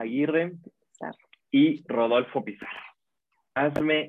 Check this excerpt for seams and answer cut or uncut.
uncut